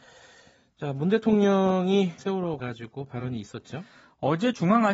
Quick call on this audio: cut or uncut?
cut